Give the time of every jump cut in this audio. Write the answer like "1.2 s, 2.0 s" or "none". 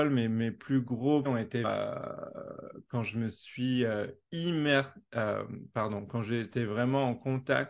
1.2 s, 1.6 s